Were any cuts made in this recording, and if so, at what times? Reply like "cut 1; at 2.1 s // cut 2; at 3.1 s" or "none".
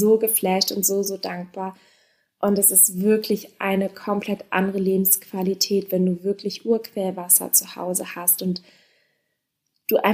none